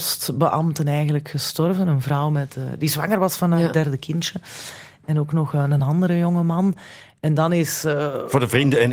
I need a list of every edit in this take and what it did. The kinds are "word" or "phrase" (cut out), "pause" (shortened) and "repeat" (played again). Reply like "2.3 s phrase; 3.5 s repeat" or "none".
none